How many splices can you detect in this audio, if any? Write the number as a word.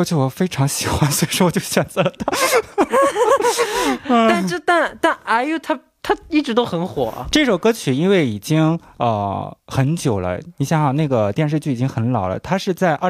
zero